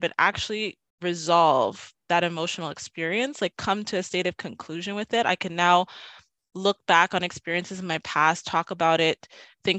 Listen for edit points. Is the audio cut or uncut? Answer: uncut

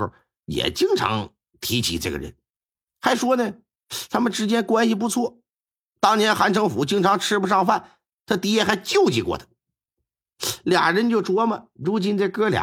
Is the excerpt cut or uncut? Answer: uncut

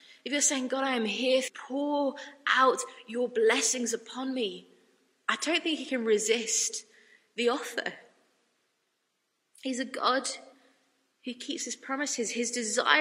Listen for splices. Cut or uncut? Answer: cut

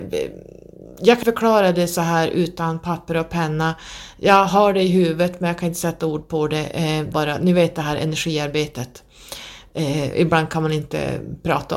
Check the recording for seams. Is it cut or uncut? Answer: cut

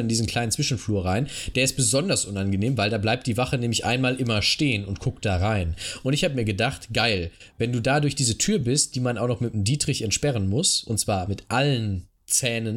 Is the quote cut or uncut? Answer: uncut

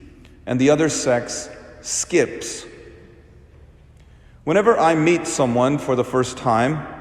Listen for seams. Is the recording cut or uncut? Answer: uncut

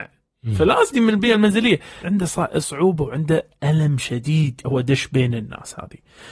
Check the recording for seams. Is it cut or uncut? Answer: cut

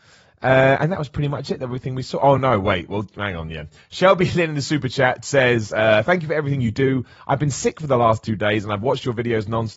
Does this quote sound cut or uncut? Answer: uncut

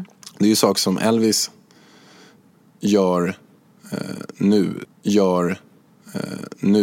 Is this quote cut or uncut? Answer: cut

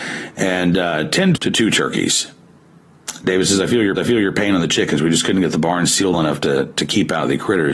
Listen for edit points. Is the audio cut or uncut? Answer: cut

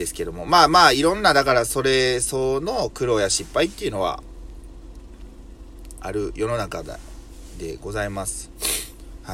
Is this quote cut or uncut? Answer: uncut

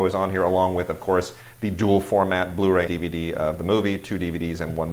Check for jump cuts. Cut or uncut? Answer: cut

